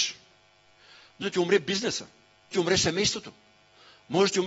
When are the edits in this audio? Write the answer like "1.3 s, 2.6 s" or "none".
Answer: 1.2 s, 2.5 s